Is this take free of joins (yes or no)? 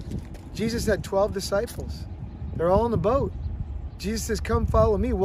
yes